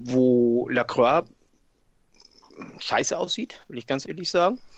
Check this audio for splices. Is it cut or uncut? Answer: cut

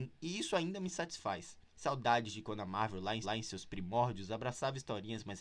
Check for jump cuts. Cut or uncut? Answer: cut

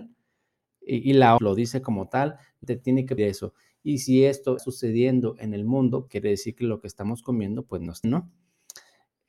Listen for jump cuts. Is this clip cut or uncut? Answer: cut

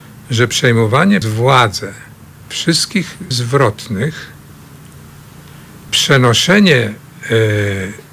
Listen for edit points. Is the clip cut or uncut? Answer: cut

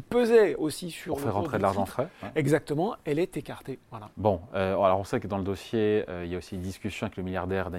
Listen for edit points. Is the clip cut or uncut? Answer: cut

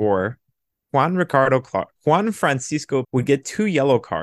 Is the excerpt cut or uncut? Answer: cut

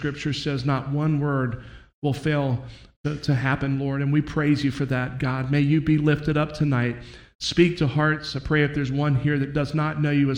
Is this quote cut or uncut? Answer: uncut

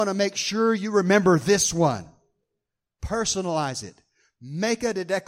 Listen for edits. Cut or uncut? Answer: uncut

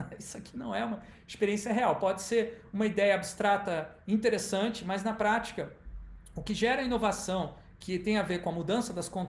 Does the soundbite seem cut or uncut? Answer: uncut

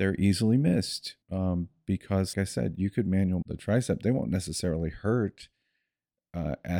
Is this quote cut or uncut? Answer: cut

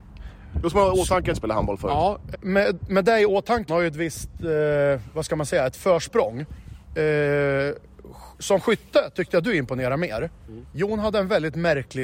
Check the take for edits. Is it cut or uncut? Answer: cut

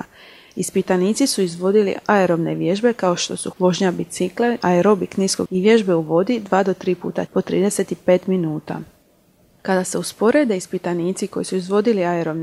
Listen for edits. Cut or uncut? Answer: cut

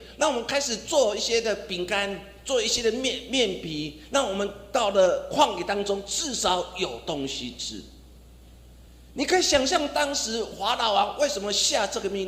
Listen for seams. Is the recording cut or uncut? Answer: uncut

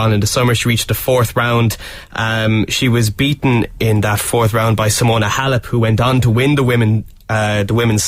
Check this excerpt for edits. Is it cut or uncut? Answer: uncut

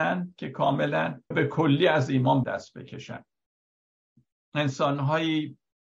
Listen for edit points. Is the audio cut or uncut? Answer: cut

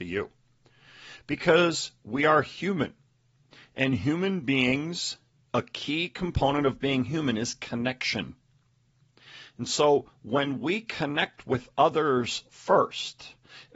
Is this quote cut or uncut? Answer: uncut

